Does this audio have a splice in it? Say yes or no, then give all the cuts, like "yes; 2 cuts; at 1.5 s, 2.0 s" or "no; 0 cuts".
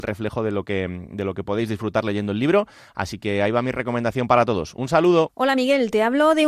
no; 0 cuts